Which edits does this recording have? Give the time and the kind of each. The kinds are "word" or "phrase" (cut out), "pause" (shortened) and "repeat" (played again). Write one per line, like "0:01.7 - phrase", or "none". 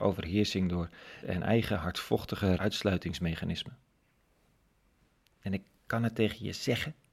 0:01.2 - word
0:02.6 - word

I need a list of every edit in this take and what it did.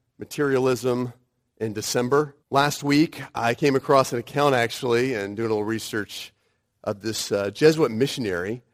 0:02.4 - pause

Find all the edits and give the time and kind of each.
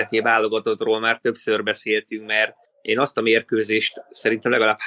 none

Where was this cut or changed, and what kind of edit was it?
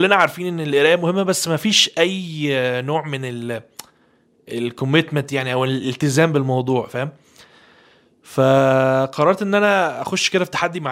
none

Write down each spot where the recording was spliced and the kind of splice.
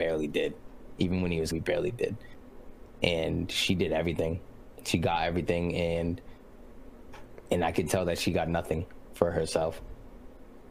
0:01.5 - word

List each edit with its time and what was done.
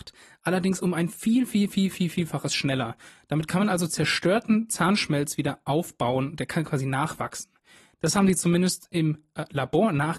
none

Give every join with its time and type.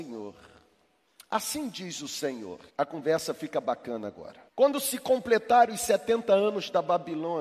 0:02.7 - pause
0:04.5 - pause

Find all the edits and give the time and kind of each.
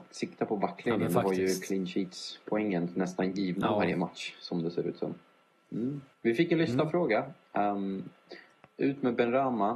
0:06.1 - pause

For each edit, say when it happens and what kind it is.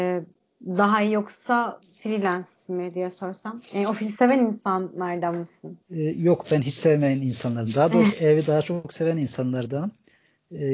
0:05.8 - pause
0:08.1 - word

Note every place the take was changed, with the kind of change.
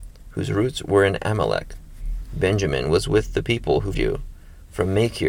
0:03.9 - word

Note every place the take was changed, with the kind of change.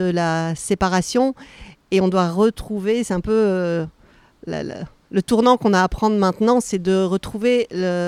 none

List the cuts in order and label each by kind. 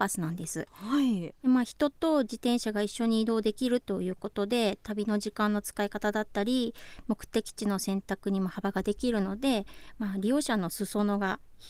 none

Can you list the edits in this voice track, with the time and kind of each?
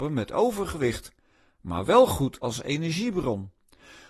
none

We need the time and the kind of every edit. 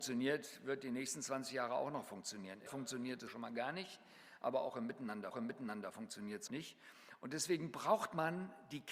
0:02.7 - phrase
0:03.3 - word
0:05.3 - repeat
0:06.5 - word

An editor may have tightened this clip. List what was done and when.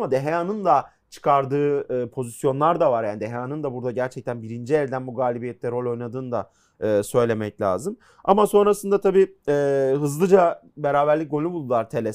none

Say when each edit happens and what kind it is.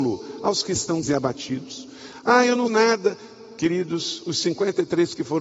0:01.0 - word
0:02.7 - phrase

